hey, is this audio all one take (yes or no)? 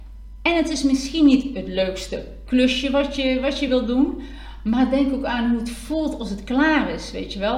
yes